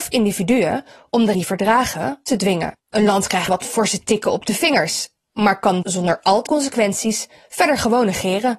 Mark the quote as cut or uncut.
cut